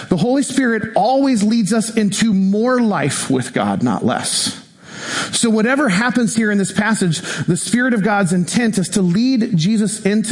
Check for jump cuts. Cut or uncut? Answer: uncut